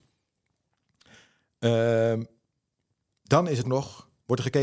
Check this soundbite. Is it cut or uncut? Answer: cut